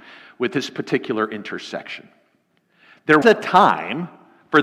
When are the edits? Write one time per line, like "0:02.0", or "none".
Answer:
0:03.2